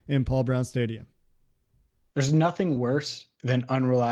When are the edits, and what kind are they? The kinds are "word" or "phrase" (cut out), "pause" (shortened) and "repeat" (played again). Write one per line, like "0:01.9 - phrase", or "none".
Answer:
none